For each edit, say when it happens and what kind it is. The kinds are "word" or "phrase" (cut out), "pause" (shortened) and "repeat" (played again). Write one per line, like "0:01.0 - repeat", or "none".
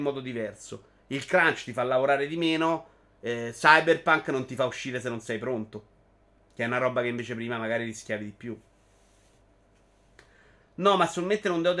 none